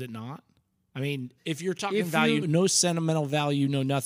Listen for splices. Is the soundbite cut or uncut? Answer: cut